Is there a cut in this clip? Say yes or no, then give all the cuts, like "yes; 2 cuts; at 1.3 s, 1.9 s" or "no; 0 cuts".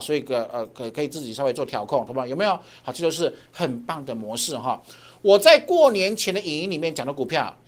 no; 0 cuts